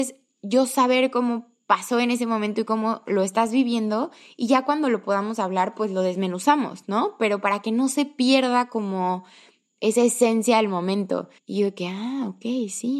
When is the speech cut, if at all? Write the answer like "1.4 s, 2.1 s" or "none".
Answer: 11.4 s